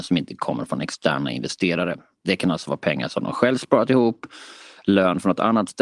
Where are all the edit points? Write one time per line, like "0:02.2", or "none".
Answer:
none